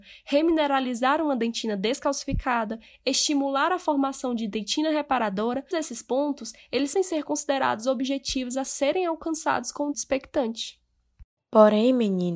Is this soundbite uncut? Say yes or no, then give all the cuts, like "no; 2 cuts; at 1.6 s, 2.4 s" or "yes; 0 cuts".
no; 4 cuts; at 5.7 s, 6.9 s, 9.9 s, 11.4 s